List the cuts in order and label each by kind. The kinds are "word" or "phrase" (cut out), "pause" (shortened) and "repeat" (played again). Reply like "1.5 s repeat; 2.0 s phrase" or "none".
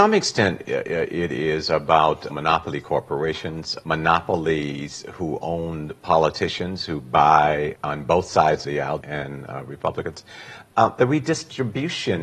2.3 s word; 3.8 s word; 7.7 s word; 8.6 s word; 9.0 s phrase